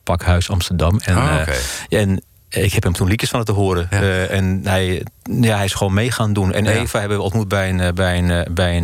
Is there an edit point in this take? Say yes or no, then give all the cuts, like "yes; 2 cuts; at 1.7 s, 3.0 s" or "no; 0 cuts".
no; 0 cuts